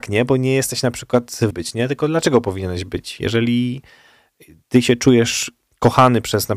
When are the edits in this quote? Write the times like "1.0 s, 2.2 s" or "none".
1.5 s